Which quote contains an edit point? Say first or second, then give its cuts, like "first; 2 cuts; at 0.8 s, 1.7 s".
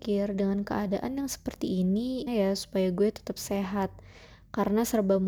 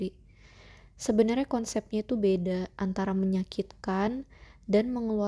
first; 1 cut; at 2.3 s